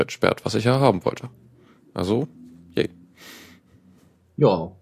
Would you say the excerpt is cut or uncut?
uncut